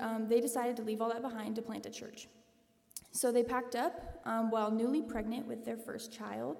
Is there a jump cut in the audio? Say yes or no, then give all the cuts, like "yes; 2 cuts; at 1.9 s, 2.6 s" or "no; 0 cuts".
no; 0 cuts